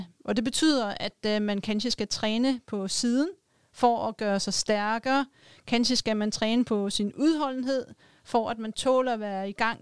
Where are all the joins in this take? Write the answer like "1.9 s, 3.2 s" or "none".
none